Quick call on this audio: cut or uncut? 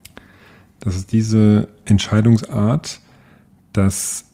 uncut